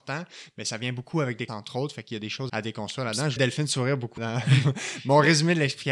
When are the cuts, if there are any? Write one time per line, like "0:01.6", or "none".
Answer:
0:01.5
0:02.5
0:03.4
0:04.2